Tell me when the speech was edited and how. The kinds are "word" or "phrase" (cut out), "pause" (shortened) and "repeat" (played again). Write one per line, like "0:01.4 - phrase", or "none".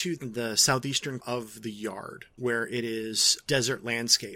0:01.2 - word